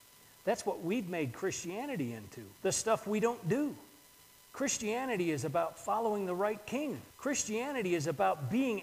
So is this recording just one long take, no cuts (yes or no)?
no